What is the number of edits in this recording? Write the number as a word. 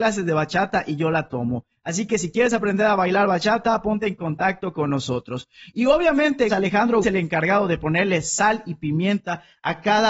two